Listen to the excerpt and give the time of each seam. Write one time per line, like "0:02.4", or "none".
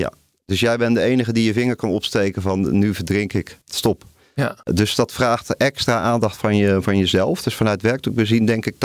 none